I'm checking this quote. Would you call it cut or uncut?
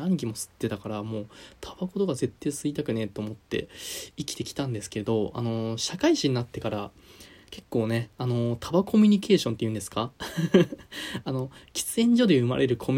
cut